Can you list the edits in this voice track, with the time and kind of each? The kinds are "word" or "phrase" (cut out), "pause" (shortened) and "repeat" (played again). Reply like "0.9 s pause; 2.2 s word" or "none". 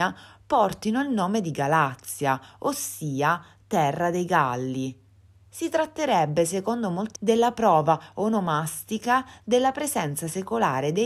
7.2 s word